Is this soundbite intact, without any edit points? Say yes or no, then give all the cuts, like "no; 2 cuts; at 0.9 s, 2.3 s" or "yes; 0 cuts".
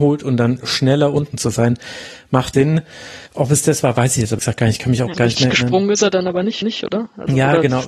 no; 5 cuts; at 2.5 s, 3.3 s, 4.4 s, 5.1 s, 6.6 s